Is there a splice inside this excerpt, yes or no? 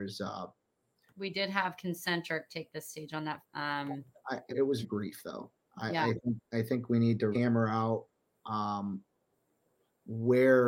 yes